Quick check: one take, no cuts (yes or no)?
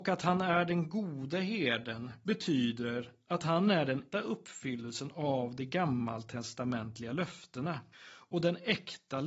no